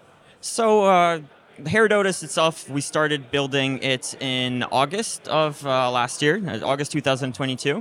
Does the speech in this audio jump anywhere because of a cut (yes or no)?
no